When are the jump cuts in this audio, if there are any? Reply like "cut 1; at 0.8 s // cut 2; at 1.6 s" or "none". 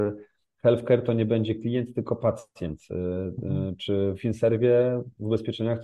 cut 1; at 4.1 s